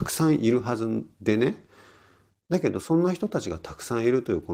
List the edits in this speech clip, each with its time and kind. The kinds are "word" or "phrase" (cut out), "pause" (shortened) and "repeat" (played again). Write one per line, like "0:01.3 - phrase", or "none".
0:01.1 - pause